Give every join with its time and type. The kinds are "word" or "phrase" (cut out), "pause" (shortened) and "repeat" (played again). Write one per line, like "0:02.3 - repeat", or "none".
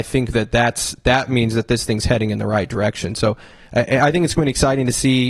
none